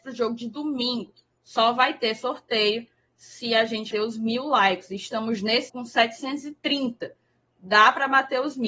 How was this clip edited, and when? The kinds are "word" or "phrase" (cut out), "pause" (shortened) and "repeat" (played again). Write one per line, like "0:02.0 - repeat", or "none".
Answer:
0:03.9 - word
0:05.7 - word